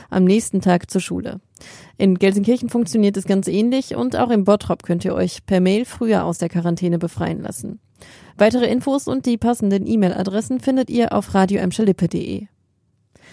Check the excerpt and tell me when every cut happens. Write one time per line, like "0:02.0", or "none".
none